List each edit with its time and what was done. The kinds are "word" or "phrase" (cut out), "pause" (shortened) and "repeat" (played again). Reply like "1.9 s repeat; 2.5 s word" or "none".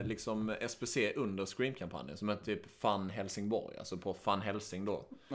none